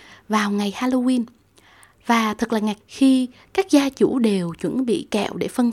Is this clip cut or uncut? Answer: cut